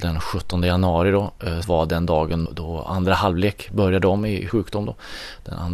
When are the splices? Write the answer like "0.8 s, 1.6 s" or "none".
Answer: 1.6 s, 2.5 s, 4.5 s